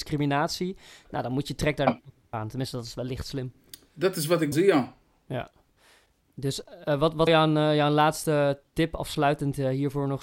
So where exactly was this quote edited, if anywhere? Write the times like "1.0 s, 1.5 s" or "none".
1.9 s, 4.5 s, 7.3 s